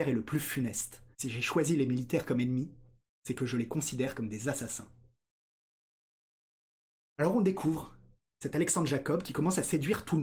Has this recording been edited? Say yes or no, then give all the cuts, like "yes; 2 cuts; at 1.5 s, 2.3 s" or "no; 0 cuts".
yes; 1 cut; at 1.1 s